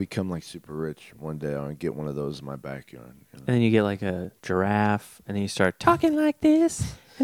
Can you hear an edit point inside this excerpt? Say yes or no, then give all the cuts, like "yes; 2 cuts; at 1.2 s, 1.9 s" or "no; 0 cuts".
no; 0 cuts